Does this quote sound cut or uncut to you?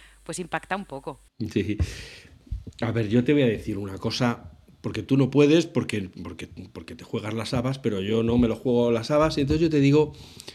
cut